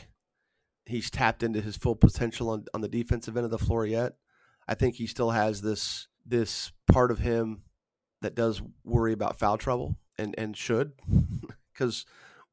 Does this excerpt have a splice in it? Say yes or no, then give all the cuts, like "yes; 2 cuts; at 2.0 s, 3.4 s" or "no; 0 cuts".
yes; 3 cuts; at 6.2 s, 7.9 s, 10.1 s